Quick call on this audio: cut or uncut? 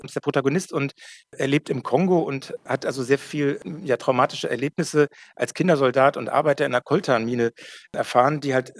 uncut